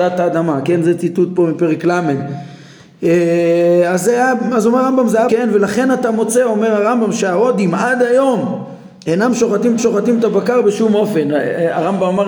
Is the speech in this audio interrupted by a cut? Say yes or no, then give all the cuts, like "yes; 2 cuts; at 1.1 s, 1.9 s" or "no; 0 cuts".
yes; 2 cuts; at 5.3 s, 9.8 s